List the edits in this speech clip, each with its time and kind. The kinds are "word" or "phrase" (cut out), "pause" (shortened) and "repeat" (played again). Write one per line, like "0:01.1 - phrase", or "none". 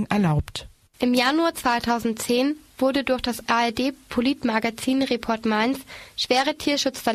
none